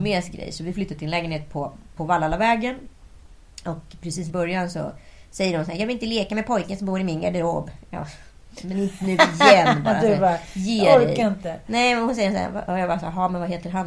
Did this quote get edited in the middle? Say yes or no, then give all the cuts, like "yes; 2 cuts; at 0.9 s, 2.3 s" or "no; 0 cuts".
yes; 2 cuts; at 2.0 s, 4.3 s